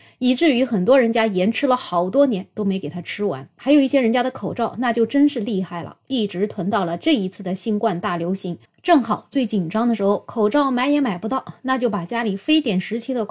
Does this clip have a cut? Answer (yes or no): no